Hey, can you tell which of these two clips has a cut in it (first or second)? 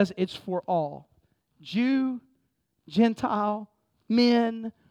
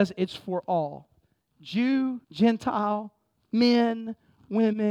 second